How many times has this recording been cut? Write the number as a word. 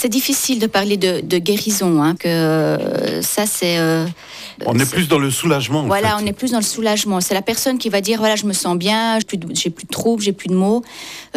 four